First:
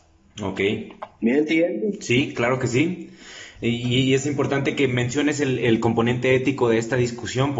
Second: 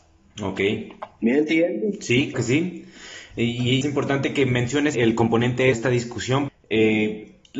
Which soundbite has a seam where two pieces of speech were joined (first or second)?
second